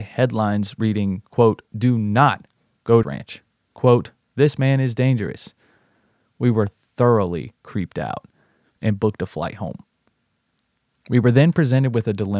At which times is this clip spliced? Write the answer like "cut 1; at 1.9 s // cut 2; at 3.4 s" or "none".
cut 1; at 3.0 s